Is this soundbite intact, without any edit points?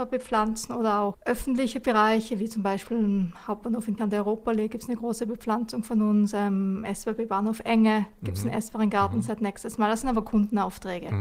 no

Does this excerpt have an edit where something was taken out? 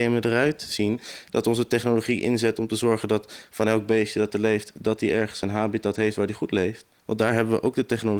no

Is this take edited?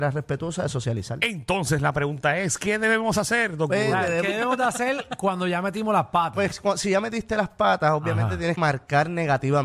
yes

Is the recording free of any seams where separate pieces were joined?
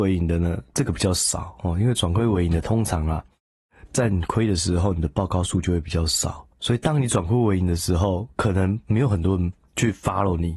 no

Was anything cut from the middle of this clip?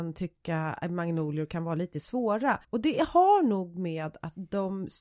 yes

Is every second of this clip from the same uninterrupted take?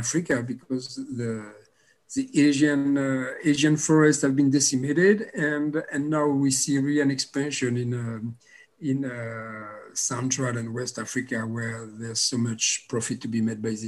yes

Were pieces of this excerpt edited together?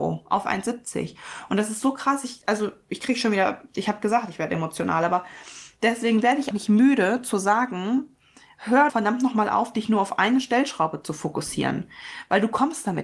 yes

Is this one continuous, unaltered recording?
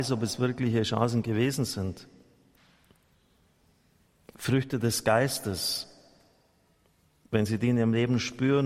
yes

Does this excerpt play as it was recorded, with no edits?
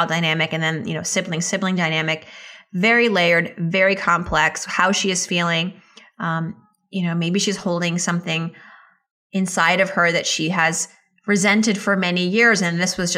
yes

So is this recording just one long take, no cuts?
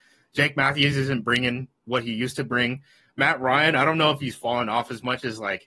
yes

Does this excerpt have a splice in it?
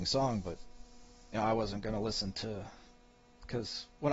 yes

